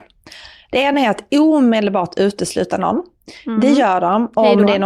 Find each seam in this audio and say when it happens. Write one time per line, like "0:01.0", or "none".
none